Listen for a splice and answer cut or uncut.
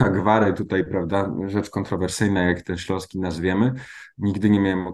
uncut